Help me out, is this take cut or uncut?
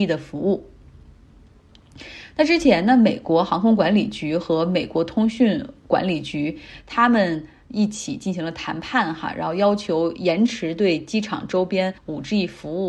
cut